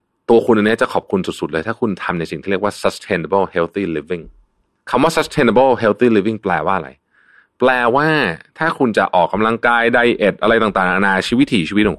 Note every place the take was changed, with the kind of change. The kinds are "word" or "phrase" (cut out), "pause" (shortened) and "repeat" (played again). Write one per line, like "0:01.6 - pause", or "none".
none